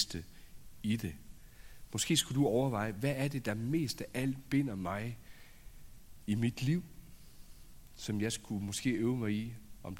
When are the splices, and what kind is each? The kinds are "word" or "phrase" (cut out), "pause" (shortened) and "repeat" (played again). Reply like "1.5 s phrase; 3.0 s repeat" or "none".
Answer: none